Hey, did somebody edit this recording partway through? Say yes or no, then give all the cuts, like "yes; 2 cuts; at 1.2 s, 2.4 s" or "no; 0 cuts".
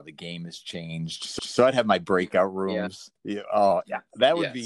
yes; 2 cuts; at 1.4 s, 3.2 s